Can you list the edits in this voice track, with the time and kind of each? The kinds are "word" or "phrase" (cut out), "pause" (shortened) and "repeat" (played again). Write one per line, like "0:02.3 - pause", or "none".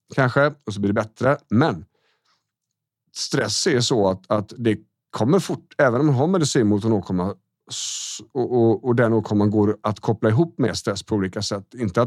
none